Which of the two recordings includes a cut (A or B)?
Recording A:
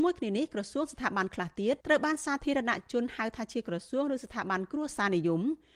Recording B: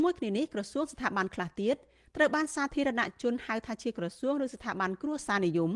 A